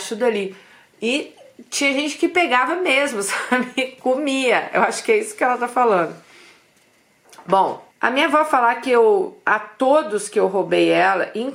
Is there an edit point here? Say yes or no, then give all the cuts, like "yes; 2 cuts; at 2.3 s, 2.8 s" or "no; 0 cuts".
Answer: yes; 1 cut; at 7.9 s